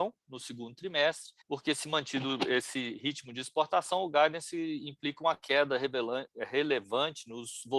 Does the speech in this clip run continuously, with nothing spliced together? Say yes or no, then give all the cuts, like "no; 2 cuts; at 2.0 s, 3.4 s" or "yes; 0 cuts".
no; 1 cut; at 1.4 s